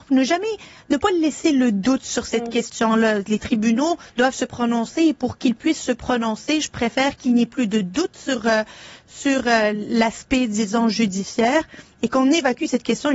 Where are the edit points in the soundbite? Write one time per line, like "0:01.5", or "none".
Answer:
0:04.1

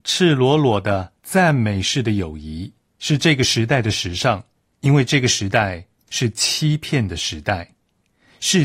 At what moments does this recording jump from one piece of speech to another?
0:04.6

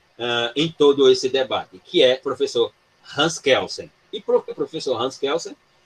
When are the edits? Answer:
0:02.2
0:04.5

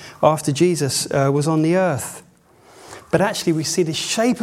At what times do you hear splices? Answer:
none

